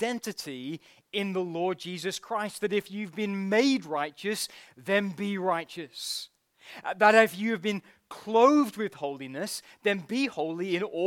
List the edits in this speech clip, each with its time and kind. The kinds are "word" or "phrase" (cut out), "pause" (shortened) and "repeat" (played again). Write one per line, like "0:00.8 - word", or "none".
none